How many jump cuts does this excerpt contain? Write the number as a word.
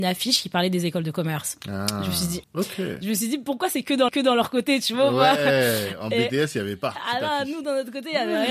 two